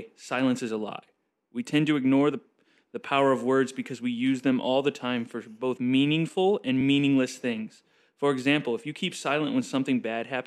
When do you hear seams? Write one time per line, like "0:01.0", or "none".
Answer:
none